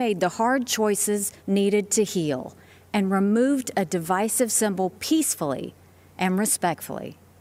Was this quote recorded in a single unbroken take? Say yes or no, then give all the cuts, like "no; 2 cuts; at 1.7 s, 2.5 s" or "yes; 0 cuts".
no; 1 cut; at 1.4 s